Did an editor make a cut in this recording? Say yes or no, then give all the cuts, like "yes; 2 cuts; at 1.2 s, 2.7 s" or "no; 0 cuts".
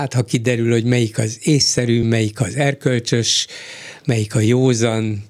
no; 0 cuts